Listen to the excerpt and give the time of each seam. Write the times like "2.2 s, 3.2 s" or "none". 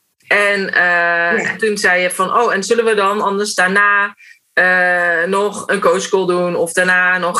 none